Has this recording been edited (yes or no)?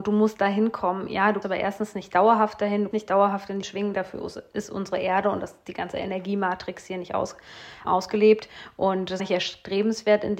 yes